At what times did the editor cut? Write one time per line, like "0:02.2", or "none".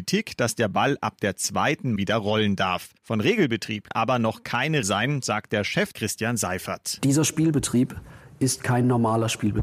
0:02.0
0:03.0
0:03.9
0:04.8
0:05.9